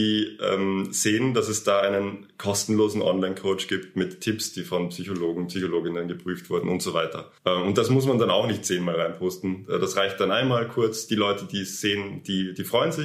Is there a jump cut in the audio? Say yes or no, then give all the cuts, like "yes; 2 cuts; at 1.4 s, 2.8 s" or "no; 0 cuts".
yes; 1 cut; at 7.4 s